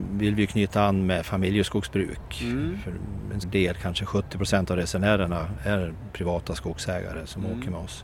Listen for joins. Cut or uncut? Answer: cut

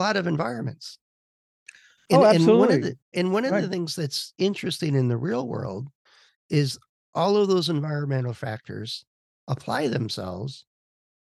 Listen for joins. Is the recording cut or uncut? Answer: uncut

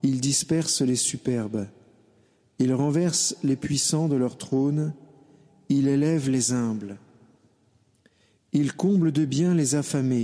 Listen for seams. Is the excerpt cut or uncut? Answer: uncut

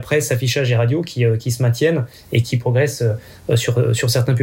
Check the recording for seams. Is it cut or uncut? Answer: uncut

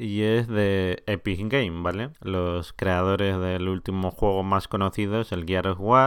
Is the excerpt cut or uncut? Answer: cut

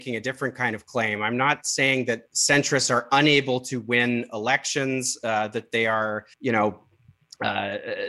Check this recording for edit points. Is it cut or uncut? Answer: cut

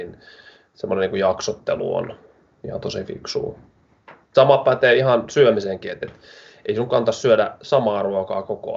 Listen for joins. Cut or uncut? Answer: uncut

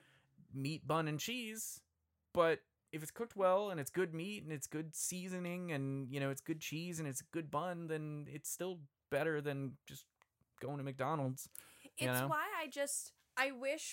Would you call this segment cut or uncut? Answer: uncut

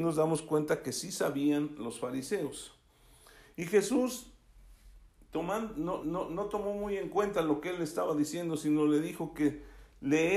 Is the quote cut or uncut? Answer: cut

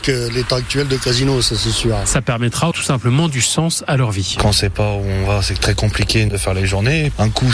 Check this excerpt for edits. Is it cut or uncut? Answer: cut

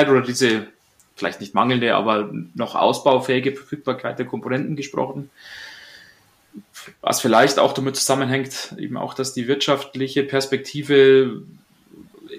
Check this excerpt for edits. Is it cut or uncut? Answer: uncut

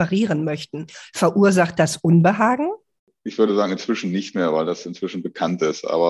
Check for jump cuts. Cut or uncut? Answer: uncut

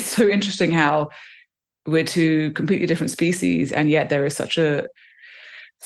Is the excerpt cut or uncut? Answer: uncut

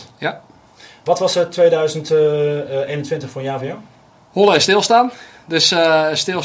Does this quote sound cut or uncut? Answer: uncut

